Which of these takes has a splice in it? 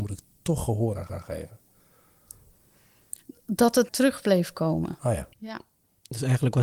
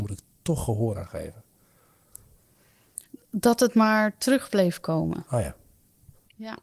first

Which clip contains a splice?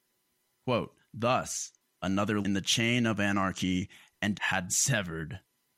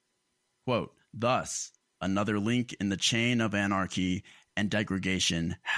first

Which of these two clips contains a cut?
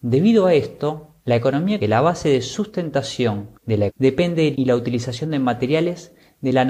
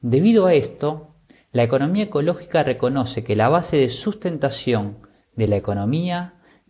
first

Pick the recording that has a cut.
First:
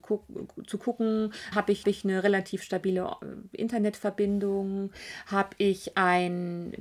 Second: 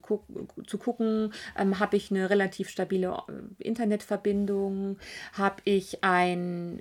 first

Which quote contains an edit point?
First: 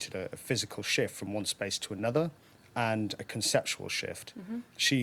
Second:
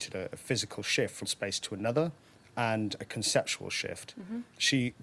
second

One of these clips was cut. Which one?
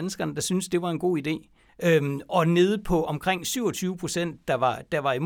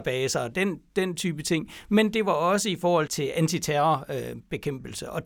second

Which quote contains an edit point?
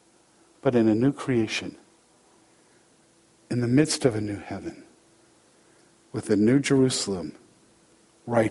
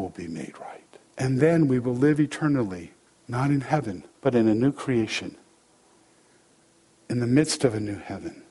second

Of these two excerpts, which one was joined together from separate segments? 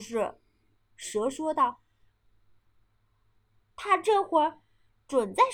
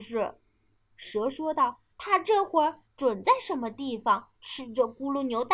second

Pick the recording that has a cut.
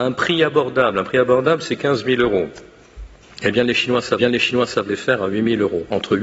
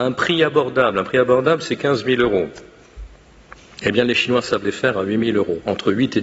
first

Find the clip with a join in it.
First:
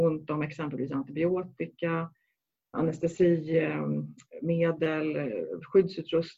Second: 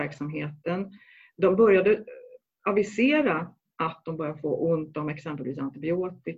first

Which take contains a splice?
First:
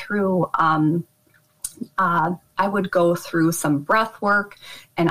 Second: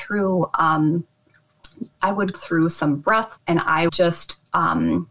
second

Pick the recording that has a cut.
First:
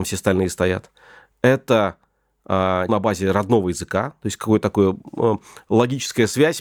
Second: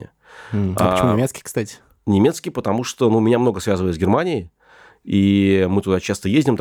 first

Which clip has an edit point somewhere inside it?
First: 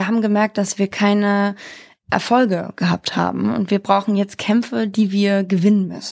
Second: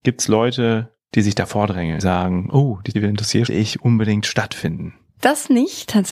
second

